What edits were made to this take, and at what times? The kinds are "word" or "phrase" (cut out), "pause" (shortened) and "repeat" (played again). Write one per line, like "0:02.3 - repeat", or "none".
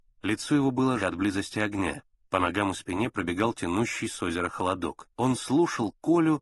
0:01.0 - word
0:02.1 - pause
0:05.1 - pause